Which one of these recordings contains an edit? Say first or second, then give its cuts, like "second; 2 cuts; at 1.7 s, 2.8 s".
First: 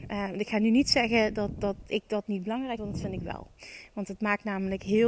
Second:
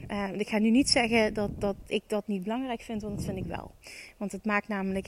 first; 1 cut; at 2.8 s